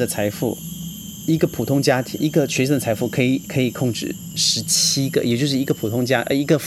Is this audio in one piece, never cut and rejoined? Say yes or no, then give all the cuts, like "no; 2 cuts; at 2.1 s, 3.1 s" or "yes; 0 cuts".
no; 1 cut; at 2.2 s